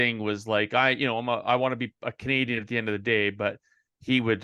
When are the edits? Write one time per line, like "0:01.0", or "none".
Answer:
none

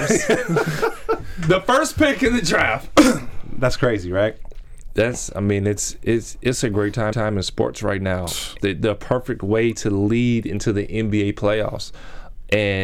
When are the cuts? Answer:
0:07.1
0:08.6

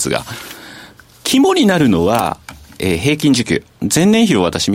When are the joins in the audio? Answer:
none

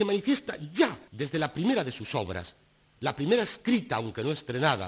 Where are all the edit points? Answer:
0:01.1

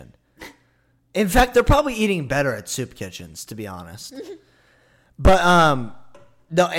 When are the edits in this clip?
none

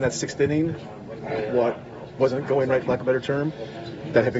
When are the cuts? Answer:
none

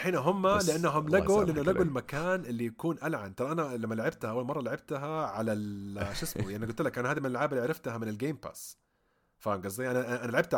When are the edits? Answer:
none

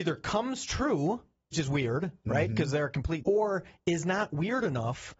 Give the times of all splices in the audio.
0:01.5
0:03.2

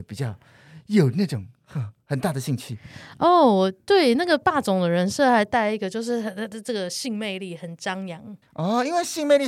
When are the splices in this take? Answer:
0:08.4

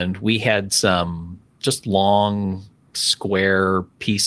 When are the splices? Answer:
0:02.7

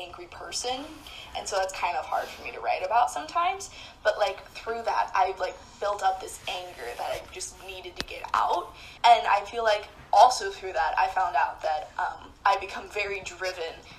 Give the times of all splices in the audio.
0:09.0

